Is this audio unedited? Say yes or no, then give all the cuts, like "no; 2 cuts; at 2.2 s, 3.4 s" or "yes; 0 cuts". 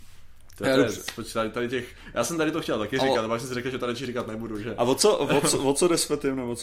yes; 0 cuts